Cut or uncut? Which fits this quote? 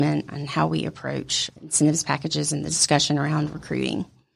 cut